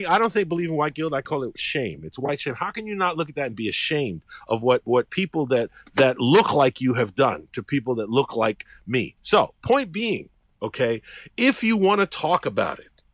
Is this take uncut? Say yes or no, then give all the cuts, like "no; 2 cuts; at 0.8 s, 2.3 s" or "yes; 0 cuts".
yes; 0 cuts